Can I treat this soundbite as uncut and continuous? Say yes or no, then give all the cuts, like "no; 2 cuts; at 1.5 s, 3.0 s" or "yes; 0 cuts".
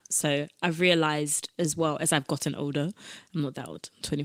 yes; 0 cuts